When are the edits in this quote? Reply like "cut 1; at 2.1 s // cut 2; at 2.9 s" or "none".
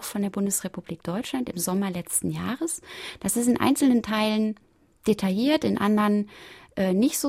none